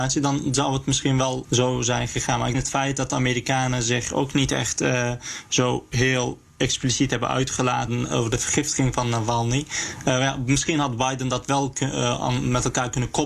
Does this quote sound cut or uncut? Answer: cut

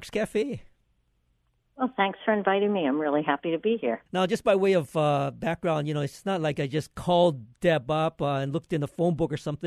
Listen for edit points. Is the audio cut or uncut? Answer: cut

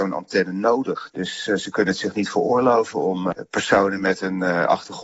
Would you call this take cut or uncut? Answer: uncut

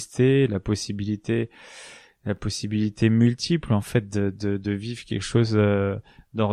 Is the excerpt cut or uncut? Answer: uncut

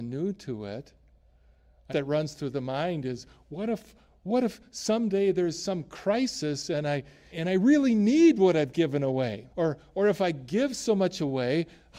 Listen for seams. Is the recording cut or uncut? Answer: cut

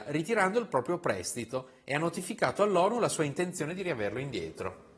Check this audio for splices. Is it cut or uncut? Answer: uncut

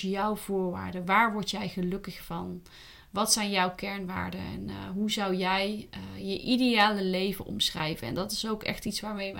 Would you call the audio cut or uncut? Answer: uncut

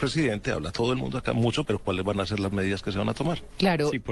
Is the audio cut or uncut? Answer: cut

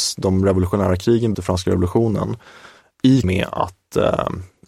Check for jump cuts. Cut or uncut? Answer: cut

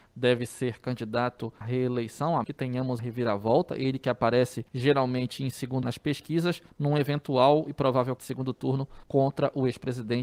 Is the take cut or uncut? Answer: cut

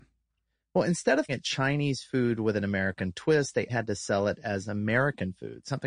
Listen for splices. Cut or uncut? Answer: cut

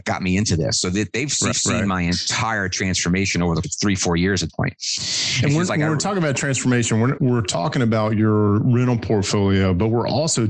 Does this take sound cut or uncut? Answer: cut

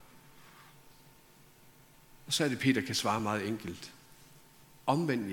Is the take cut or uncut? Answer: uncut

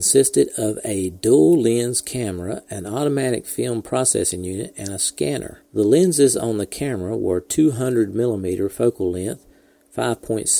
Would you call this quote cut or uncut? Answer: cut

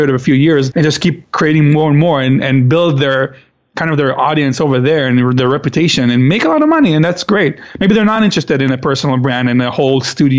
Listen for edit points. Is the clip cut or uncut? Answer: uncut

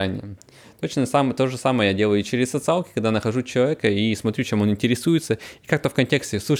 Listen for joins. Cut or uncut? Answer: uncut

